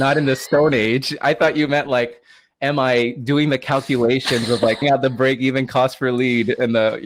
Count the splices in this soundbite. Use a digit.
1